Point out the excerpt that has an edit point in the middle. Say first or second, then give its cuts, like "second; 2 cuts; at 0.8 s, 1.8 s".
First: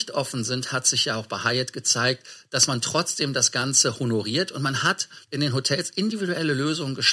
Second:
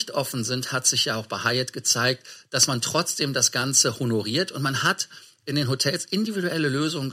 first; 1 cut; at 5.2 s